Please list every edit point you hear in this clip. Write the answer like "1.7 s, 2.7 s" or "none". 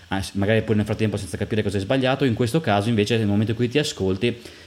none

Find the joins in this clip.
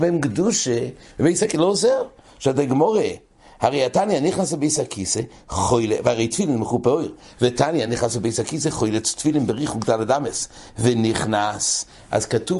none

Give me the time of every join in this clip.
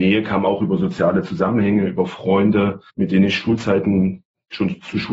2.9 s

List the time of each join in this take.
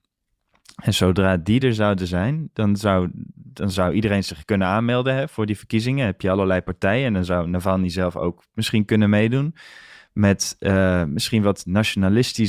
none

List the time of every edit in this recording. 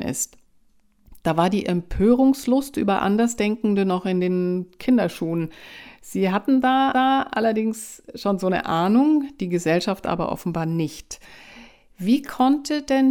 6.9 s

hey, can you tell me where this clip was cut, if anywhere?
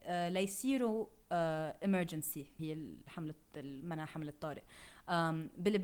2.6 s

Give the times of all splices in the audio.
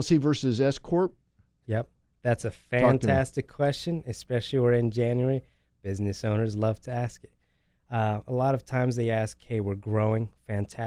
none

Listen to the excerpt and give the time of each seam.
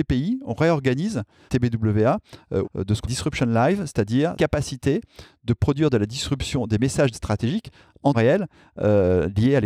1.5 s, 2.6 s, 3.0 s, 4.3 s, 7.1 s, 8.1 s

